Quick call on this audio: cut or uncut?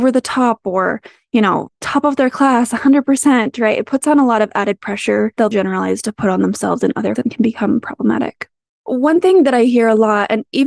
cut